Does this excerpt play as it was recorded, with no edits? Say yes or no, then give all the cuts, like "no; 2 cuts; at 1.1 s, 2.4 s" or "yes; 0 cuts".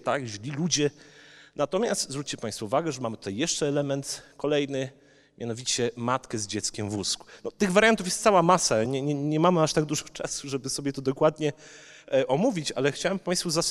yes; 0 cuts